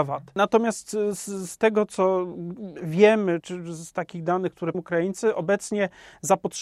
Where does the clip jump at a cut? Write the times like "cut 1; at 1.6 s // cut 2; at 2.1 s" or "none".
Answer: cut 1; at 3.4 s // cut 2; at 4.7 s